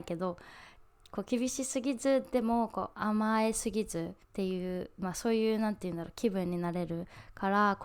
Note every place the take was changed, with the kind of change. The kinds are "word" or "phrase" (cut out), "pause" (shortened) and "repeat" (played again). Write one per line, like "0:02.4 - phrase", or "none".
0:02.9 - pause
0:04.2 - pause